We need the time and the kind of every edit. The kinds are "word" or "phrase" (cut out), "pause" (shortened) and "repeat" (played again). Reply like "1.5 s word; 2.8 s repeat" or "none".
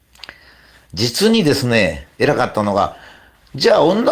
2.1 s pause